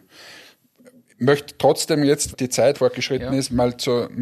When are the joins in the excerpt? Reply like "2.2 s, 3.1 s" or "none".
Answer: 2.3 s, 2.7 s